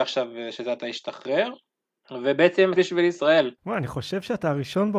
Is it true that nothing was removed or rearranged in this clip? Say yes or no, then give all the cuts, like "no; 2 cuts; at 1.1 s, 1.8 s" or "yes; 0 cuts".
no; 2 cuts; at 2.8 s, 3.6 s